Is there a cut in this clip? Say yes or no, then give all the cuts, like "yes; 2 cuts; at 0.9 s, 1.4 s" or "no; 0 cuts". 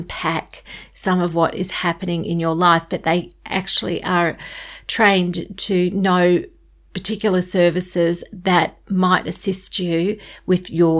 no; 0 cuts